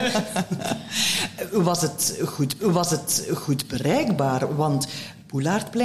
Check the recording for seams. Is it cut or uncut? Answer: cut